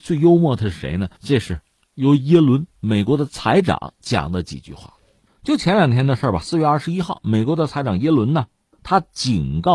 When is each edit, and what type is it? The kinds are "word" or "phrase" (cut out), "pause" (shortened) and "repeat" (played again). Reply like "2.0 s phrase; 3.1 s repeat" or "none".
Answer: 1.2 s pause